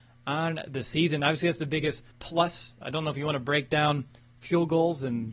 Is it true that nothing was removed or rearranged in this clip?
no; 1 cut; at 2.1 s

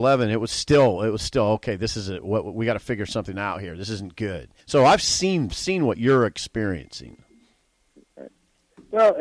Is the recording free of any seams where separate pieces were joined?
no; 2 cuts; at 4.6 s, 5.5 s

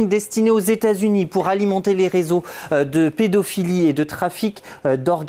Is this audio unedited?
yes; 0 cuts

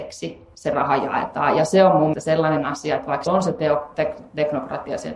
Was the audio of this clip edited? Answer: yes; 2 cuts; at 2.1 s, 3.3 s

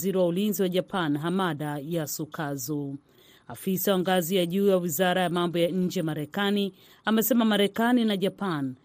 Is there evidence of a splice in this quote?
no; 0 cuts

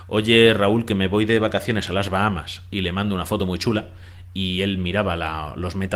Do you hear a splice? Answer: no; 0 cuts

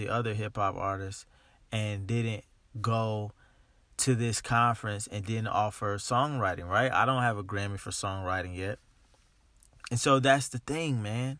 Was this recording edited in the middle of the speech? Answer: no; 0 cuts

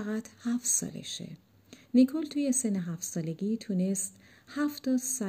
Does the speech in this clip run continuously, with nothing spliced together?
yes; 0 cuts

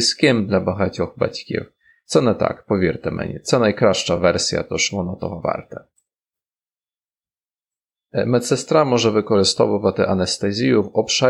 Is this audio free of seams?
yes; 0 cuts

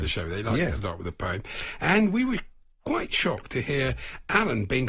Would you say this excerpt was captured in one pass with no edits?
yes; 0 cuts

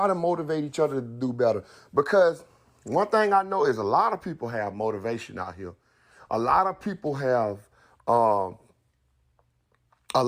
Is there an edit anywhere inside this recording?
no; 0 cuts

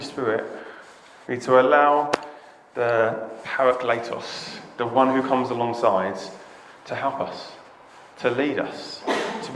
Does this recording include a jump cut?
no; 0 cuts

